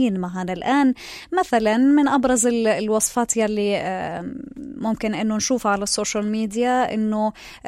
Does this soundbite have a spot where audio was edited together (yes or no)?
no